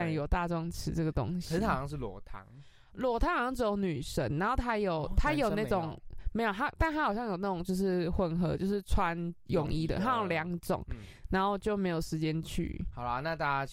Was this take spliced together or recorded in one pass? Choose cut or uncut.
uncut